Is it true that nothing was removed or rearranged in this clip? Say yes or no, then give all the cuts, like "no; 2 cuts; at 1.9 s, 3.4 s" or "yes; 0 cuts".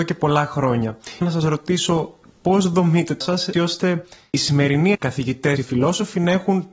no; 5 cuts; at 1.2 s, 3.2 s, 3.5 s, 4.9 s, 5.6 s